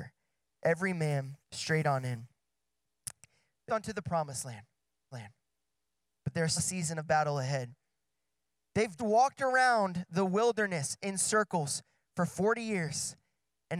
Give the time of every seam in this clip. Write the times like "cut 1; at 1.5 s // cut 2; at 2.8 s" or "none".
cut 1; at 1.4 s // cut 2; at 3.7 s // cut 3; at 5.1 s // cut 4; at 6.6 s // cut 5; at 9.0 s

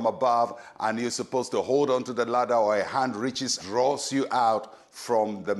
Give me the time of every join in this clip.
cut 1; at 3.6 s

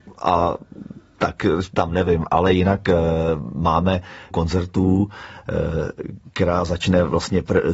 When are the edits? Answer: cut 1; at 1.8 s // cut 2; at 4.3 s

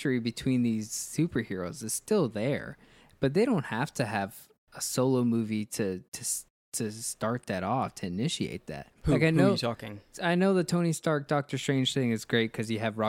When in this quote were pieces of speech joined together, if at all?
cut 1; at 6.1 s // cut 2; at 9.0 s

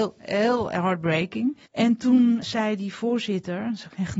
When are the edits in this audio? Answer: cut 1; at 1.7 s // cut 2; at 2.4 s

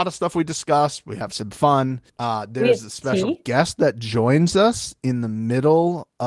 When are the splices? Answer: cut 1; at 2.1 s

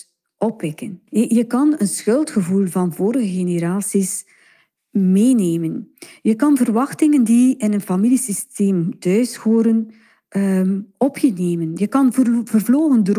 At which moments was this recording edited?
cut 1; at 1.1 s

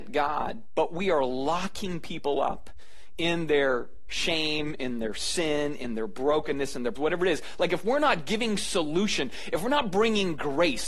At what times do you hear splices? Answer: cut 1; at 7.0 s

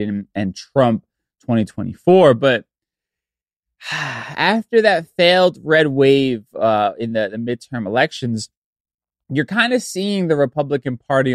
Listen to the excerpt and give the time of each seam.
none

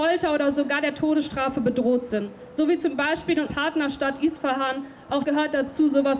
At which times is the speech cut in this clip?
cut 1; at 3.5 s // cut 2; at 5.2 s

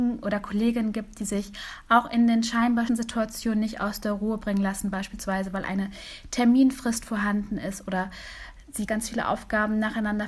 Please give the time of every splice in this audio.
cut 1; at 2.9 s // cut 2; at 8.9 s

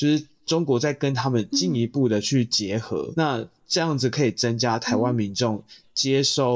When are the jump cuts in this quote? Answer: cut 1; at 3.1 s

